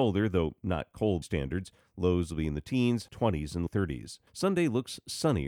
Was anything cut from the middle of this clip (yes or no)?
yes